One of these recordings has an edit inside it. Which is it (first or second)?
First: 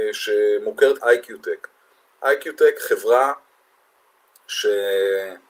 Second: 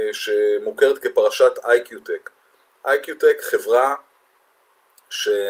first